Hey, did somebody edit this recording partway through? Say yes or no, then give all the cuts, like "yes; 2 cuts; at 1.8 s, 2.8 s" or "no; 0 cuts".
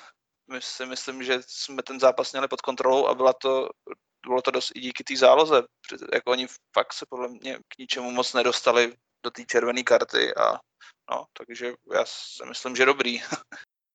yes; 2 cuts; at 7.6 s, 11.3 s